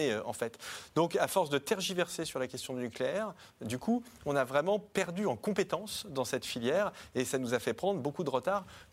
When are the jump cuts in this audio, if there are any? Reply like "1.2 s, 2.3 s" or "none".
none